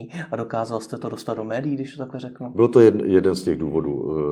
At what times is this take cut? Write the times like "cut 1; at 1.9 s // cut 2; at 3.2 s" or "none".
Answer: none